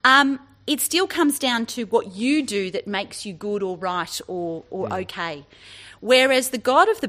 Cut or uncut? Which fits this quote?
uncut